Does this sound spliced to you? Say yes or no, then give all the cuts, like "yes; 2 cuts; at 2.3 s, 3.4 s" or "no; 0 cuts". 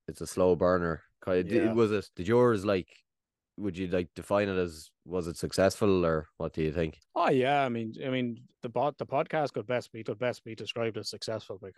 yes; 5 cuts; at 2.1 s, 3.2 s, 7.0 s, 8.5 s, 10.0 s